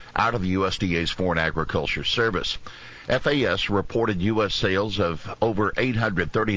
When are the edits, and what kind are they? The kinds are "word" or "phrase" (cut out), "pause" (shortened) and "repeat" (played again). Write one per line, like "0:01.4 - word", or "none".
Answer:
none